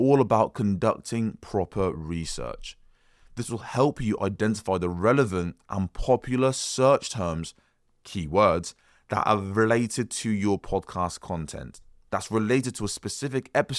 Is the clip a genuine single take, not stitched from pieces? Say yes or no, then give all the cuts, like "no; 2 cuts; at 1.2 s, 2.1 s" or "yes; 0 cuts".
yes; 0 cuts